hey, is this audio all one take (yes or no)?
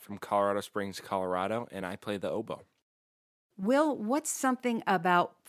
yes